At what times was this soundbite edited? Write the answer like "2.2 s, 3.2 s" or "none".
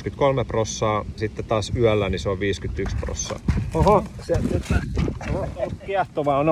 1.2 s